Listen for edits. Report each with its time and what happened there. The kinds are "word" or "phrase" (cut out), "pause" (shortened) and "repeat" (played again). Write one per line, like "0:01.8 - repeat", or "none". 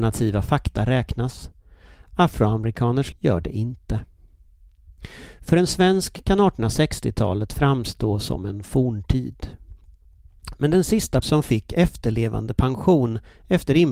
0:03.1 - word
0:11.2 - word

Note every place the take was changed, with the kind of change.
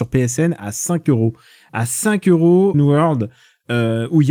0:02.7 - word

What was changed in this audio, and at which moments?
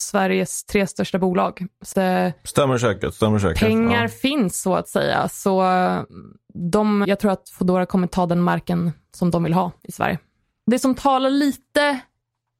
0:01.9 - word
0:07.0 - word

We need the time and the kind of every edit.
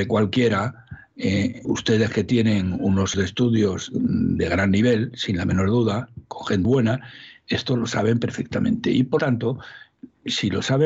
0:01.6 - word
0:03.1 - word
0:06.6 - word
0:09.2 - word

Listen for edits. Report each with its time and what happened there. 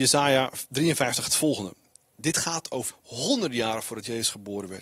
0:02.9 - word

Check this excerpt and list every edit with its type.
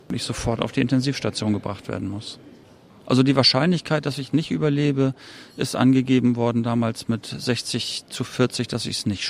none

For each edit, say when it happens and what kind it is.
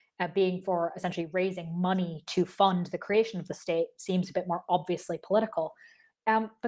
none

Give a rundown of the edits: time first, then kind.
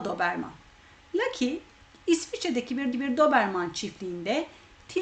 0:02.9 - repeat

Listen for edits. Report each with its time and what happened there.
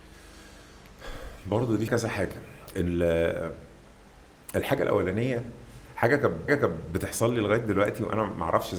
0:01.4 - pause
0:01.9 - word
0:06.5 - repeat

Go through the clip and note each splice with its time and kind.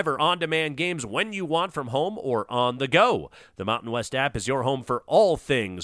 none

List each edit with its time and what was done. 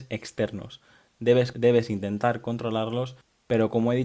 0:01.5 - word

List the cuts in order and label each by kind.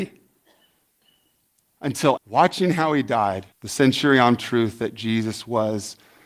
0:02.2 - phrase
0:03.5 - pause
0:04.4 - phrase

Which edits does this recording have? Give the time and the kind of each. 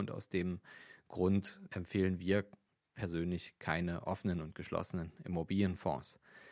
0:01.7 - word

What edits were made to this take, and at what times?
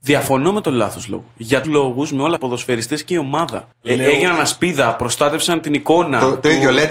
0:01.3 - pause
0:01.6 - word
0:02.4 - phrase
0:03.7 - pause

